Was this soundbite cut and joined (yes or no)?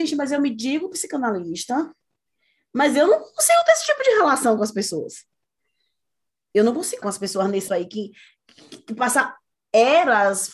yes